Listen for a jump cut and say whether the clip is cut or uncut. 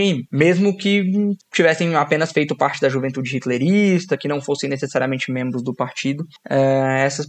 cut